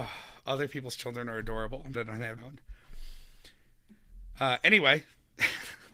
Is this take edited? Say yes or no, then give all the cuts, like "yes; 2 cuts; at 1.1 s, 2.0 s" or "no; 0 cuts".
yes; 2 cuts; at 1.9 s, 2.4 s